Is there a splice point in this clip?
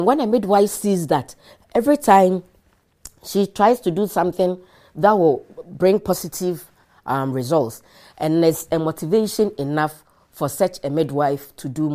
no; 0 cuts

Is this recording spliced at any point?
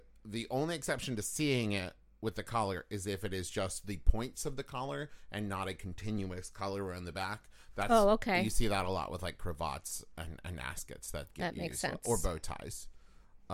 no; 0 cuts

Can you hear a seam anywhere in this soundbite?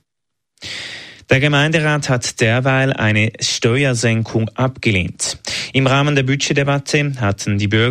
no; 0 cuts

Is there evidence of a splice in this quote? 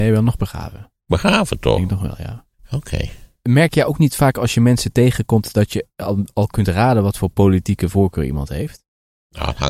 yes; 1 cut; at 2.5 s

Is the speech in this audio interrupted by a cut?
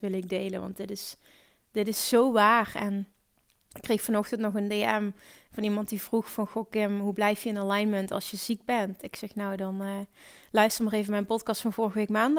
no; 0 cuts

